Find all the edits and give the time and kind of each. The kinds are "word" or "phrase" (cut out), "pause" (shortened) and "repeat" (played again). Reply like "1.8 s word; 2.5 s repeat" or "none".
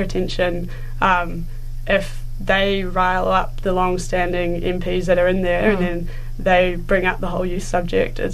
none